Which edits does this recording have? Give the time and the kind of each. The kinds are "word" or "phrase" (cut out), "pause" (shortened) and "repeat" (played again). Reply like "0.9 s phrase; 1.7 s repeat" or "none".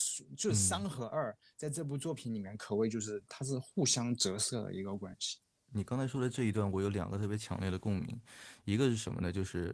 none